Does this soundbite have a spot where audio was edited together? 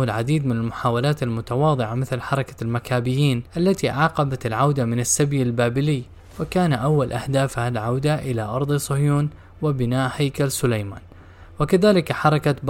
no; 0 cuts

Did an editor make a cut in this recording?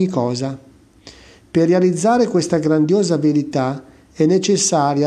no; 0 cuts

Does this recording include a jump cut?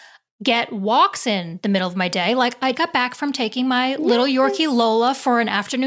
yes; 1 cut; at 2.7 s

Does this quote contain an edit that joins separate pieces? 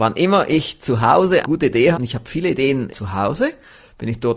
yes; 3 cuts; at 1.4 s, 1.9 s, 2.9 s

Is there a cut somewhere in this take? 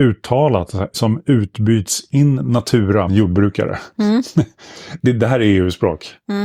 yes; 2 cuts; at 0.9 s, 3.1 s

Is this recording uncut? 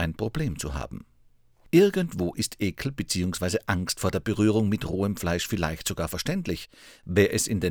yes; 0 cuts

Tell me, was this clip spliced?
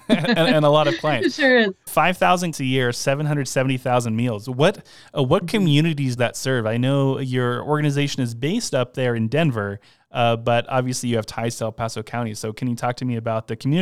yes; 3 cuts; at 1.9 s, 2.5 s, 6.2 s

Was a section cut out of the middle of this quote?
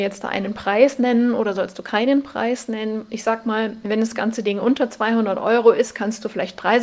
no; 0 cuts

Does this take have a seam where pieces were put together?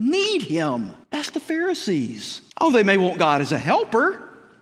yes; 2 cuts; at 1.0 s, 2.5 s

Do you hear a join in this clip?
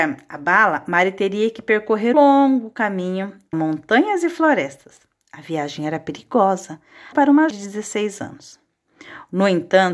yes; 4 cuts; at 2.1 s, 3.5 s, 7.1 s, 7.5 s

